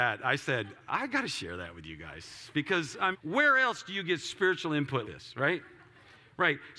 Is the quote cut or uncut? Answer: cut